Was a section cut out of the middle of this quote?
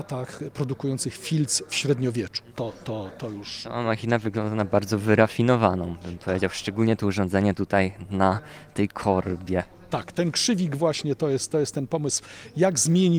no; 0 cuts

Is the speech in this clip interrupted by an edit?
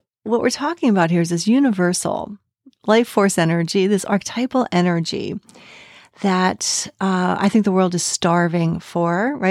no; 0 cuts

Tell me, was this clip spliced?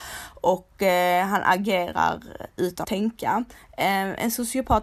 yes; 1 cut; at 2.8 s

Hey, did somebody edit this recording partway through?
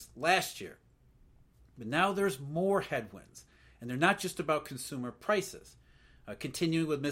no; 0 cuts

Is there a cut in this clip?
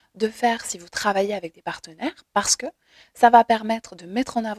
no; 0 cuts

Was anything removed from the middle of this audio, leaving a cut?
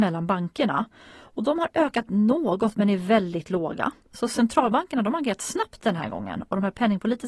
no; 0 cuts

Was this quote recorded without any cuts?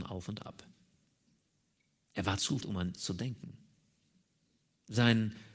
no; 2 cuts; at 2.6 s, 3.0 s

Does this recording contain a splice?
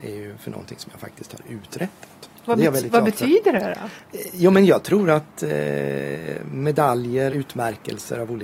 yes; 1 cut; at 7.3 s

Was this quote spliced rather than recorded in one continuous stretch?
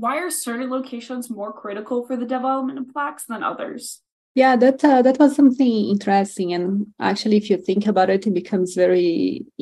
no; 0 cuts

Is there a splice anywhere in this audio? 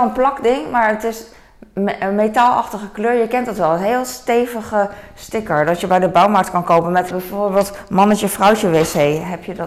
yes; 1 cut; at 7.1 s

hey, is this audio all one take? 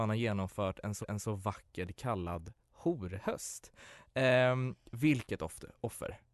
no; 1 cut; at 1.0 s

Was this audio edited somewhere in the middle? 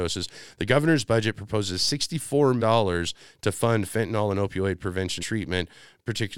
yes; 2 cuts; at 2.6 s, 5.2 s

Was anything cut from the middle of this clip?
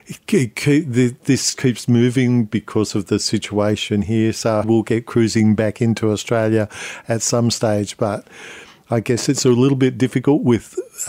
yes; 2 cuts; at 1.6 s, 4.6 s

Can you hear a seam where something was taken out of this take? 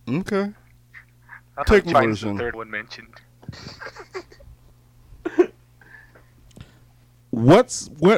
yes; 4 cuts; at 1.6 s, 1.9 s, 2.5 s, 7.2 s

